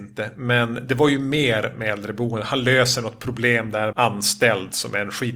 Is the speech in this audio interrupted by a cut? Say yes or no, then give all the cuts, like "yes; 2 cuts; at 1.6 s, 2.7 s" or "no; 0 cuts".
yes; 1 cut; at 3.9 s